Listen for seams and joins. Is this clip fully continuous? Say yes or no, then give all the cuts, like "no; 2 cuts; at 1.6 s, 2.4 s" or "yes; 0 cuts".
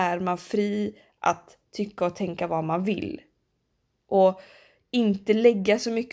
yes; 0 cuts